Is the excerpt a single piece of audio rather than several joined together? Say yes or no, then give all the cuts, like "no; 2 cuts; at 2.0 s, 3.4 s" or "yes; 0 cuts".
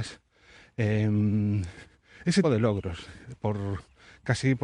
no; 1 cut; at 2.4 s